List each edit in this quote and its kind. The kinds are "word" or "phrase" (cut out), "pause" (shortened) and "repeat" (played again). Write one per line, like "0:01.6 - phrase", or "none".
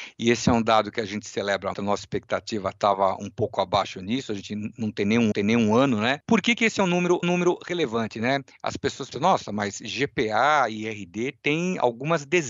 0:01.7 - word
0:05.3 - repeat
0:07.2 - repeat
0:09.1 - word